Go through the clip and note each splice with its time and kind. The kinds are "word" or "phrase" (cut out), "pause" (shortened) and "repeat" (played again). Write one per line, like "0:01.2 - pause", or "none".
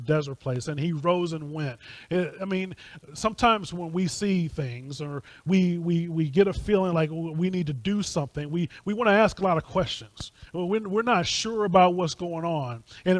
0:10.5 - pause